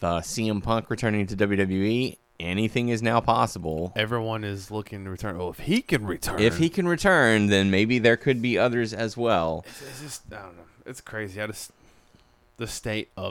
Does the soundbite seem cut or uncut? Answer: uncut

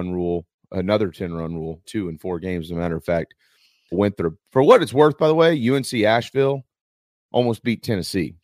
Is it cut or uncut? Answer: cut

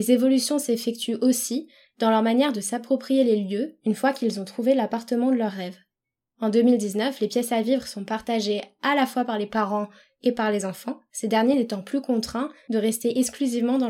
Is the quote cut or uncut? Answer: uncut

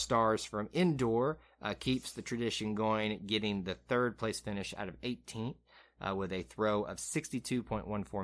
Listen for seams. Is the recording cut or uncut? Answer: uncut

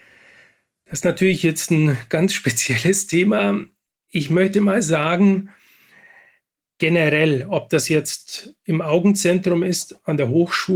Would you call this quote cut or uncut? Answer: uncut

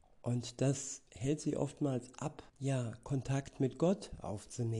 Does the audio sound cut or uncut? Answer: cut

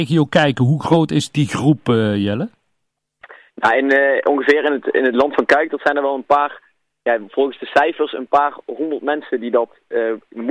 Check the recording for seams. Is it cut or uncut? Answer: uncut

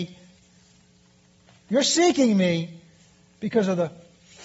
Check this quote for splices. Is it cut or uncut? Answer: uncut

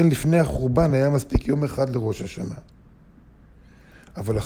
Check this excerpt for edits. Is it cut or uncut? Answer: uncut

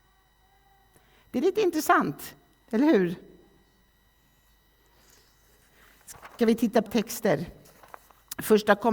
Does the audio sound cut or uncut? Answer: cut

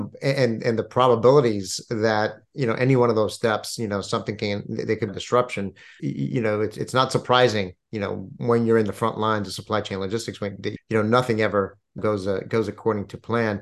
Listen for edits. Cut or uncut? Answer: cut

